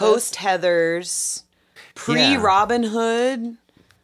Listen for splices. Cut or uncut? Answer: uncut